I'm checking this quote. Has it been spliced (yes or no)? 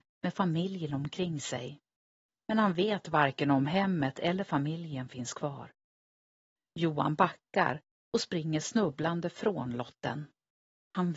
no